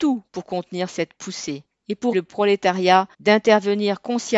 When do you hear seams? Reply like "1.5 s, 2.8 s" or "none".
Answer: 2.1 s, 3.1 s